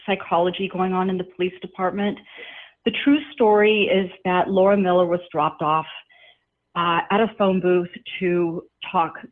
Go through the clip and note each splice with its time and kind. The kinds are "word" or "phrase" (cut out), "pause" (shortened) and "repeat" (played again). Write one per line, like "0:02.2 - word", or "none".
none